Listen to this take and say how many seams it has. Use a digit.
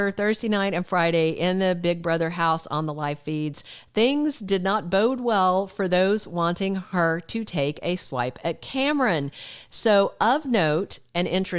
0